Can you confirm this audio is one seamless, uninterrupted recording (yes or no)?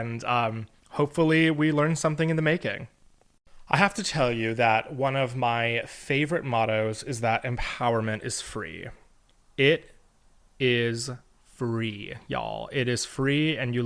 yes